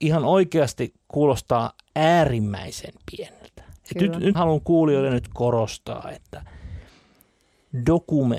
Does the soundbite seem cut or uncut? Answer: cut